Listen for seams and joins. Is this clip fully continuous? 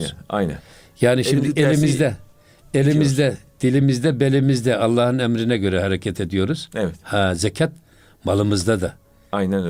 yes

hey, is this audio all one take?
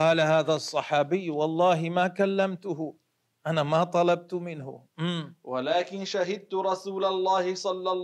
yes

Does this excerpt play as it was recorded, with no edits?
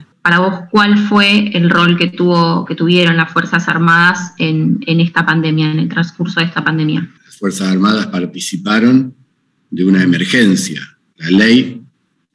yes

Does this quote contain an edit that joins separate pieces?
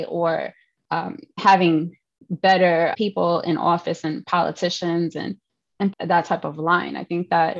yes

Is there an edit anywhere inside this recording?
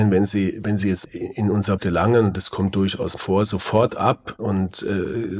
yes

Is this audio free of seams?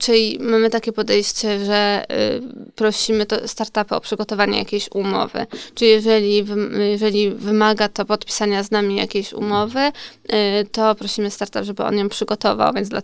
yes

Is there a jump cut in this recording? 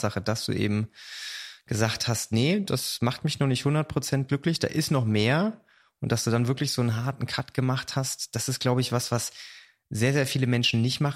no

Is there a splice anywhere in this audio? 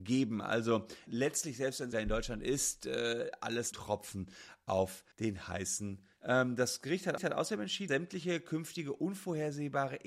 yes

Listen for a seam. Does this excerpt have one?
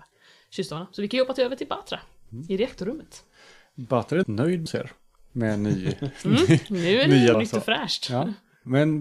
yes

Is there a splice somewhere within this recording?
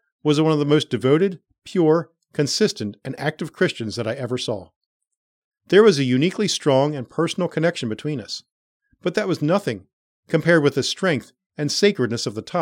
no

